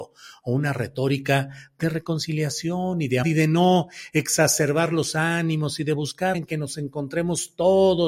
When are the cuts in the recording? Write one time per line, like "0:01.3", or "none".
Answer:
0:03.2
0:06.3